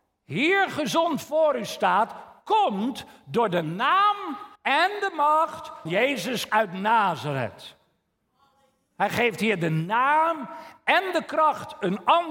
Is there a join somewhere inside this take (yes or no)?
yes